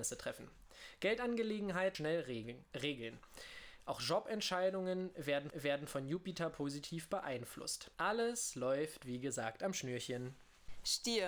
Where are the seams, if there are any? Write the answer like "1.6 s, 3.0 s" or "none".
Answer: 1.9 s, 5.5 s, 7.9 s

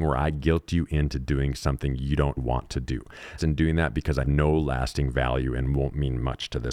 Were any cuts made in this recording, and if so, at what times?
2.4 s, 3.4 s, 4.2 s

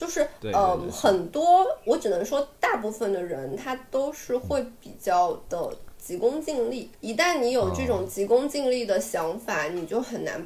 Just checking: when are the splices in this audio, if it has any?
6.9 s

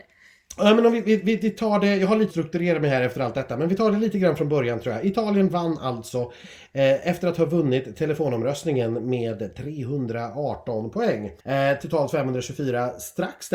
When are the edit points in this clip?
2.3 s, 11.4 s

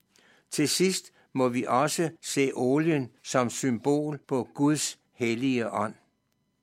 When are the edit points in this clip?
2.2 s, 3.2 s, 4.2 s

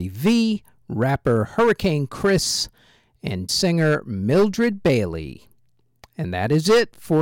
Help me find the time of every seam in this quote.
3.5 s

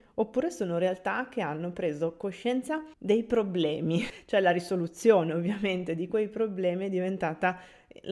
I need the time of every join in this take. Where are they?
2.9 s

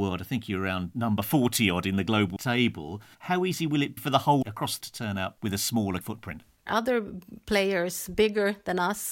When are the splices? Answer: 2.4 s, 4.0 s, 4.4 s, 4.8 s, 5.4 s, 6.0 s

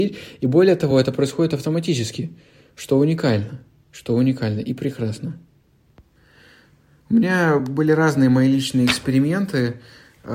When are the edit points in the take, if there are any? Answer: none

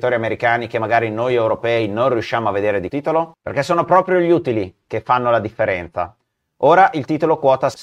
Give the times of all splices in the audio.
2.9 s

